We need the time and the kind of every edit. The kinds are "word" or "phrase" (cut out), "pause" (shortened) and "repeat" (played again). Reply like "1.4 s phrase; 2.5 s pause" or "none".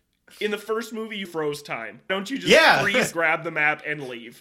1.2 s word; 2.1 s word; 3.1 s word